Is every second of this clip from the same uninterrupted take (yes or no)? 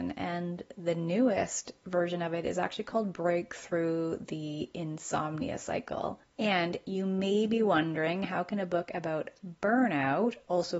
no